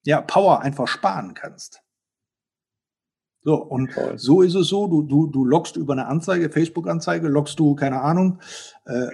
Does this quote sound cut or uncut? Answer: uncut